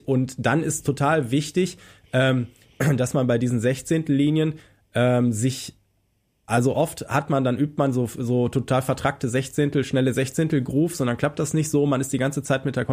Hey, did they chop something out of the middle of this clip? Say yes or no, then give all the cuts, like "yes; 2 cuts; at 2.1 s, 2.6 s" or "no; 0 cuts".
no; 0 cuts